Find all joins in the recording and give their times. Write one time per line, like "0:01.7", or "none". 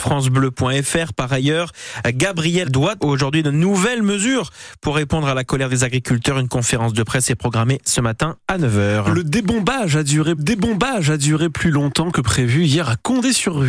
0:02.6
0:03.0
0:10.4